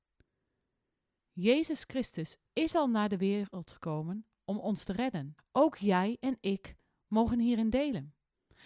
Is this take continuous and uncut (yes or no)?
no